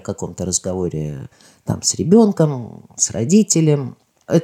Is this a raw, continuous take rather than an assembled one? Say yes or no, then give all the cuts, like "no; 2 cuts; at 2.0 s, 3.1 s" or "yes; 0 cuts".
yes; 0 cuts